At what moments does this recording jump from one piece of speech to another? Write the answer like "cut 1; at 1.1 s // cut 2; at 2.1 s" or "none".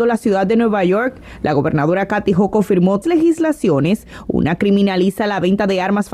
cut 1; at 3.0 s